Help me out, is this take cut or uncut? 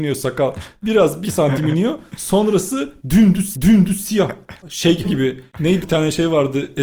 cut